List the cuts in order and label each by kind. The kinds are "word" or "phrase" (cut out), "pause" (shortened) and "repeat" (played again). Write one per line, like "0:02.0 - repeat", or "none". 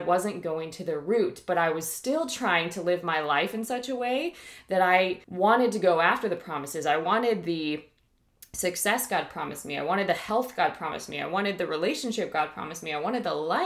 0:05.2 - pause